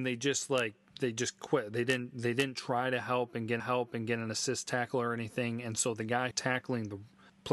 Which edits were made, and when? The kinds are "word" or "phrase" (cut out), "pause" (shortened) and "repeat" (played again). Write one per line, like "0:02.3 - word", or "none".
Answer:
0:03.6 - repeat
0:06.3 - phrase